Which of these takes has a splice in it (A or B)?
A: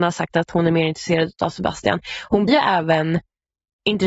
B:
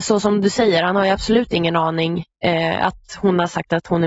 A